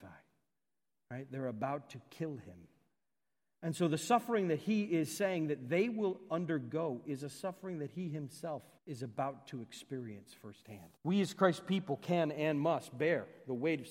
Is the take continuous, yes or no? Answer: no